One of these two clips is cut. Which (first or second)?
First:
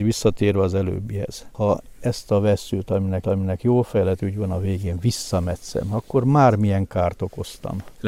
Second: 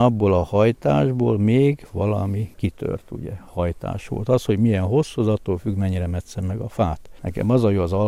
first